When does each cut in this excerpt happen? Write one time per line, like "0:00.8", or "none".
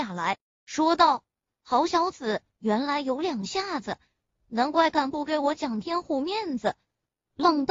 none